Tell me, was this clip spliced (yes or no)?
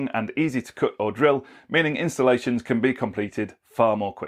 no